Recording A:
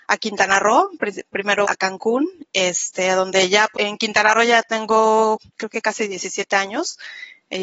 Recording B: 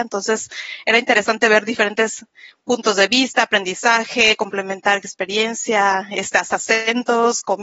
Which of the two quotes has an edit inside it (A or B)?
A